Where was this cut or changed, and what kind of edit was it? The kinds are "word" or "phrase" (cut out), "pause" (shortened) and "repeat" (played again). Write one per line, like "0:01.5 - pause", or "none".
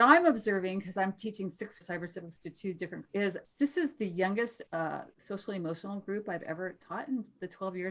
0:01.8 - phrase
0:03.0 - phrase
0:03.4 - word
0:04.7 - word
0:05.1 - pause